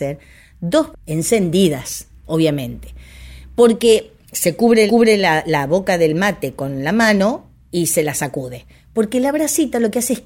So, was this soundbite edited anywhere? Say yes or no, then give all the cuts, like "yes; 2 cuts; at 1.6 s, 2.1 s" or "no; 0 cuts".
yes; 2 cuts; at 0.9 s, 4.9 s